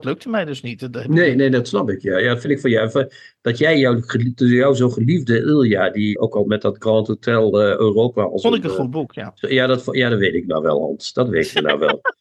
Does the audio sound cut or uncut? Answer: cut